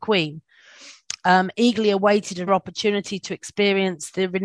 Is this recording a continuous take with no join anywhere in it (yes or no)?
no